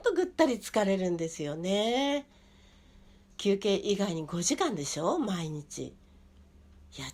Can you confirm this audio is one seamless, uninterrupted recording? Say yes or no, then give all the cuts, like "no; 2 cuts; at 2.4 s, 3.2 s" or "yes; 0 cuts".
yes; 0 cuts